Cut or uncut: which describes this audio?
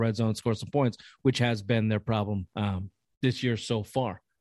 cut